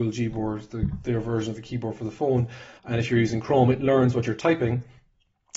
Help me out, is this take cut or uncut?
cut